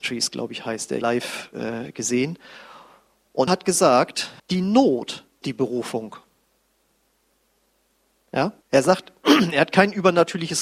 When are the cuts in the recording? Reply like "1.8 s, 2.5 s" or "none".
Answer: 1.0 s, 3.5 s, 4.4 s, 5.4 s, 8.6 s